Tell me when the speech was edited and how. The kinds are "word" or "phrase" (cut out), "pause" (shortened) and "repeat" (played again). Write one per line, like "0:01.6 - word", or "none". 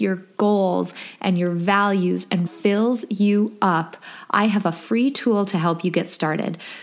0:02.5 - word